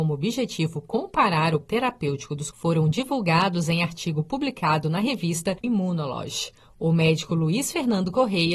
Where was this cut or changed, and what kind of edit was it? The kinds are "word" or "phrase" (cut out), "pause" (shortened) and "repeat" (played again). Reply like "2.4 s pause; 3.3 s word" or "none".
1.6 s word; 2.5 s word; 5.6 s word